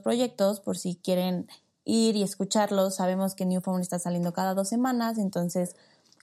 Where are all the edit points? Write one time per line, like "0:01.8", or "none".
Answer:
none